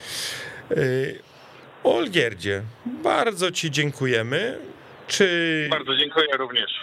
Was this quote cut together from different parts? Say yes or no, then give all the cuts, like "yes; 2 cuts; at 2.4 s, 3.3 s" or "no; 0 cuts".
yes; 1 cut; at 5.7 s